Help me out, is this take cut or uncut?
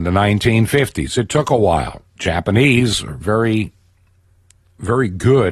cut